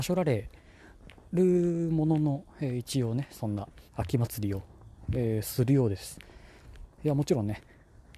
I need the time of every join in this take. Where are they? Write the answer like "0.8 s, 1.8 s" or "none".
3.9 s, 6.9 s